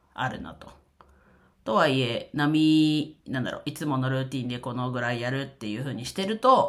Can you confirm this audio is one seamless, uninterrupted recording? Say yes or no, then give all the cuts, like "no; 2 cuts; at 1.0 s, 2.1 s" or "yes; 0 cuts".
yes; 0 cuts